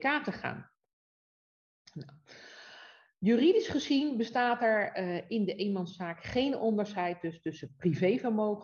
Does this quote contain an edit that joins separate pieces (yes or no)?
no